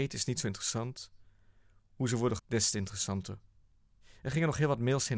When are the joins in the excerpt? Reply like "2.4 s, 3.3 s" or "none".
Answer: 2.4 s